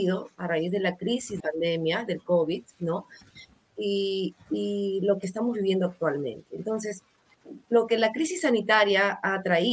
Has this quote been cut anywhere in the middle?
yes; 2 cuts; at 1.4 s, 7.6 s

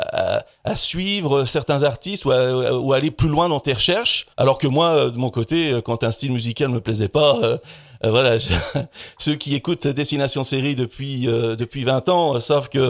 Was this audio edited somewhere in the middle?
yes; 1 cut; at 4.3 s

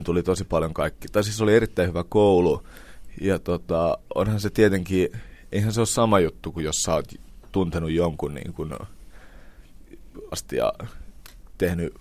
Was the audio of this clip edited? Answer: yes; 1 cut; at 10.3 s

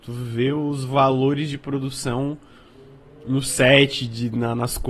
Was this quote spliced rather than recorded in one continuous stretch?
no; 0 cuts

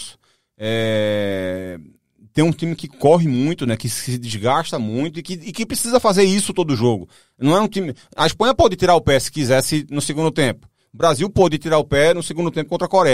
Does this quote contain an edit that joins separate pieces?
no; 0 cuts

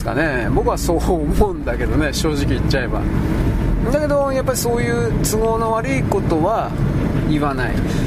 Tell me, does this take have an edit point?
no; 0 cuts

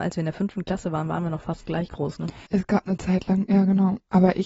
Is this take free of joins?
no; 1 cut; at 2.5 s

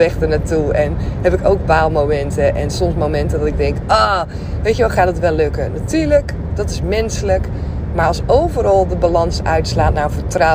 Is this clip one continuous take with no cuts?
yes; 0 cuts

